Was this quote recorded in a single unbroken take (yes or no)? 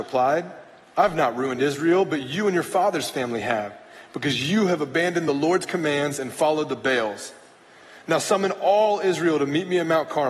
yes